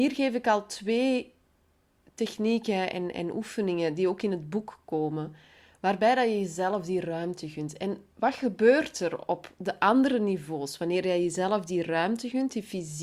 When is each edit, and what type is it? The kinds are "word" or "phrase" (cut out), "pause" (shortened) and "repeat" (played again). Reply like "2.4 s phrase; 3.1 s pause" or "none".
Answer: none